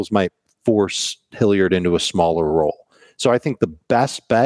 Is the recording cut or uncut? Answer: uncut